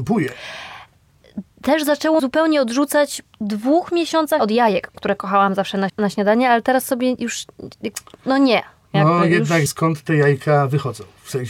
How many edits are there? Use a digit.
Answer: 6